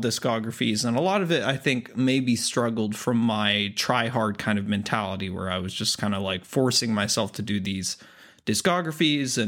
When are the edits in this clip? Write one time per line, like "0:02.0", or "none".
none